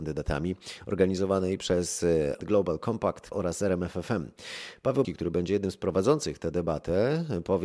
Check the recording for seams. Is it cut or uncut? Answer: cut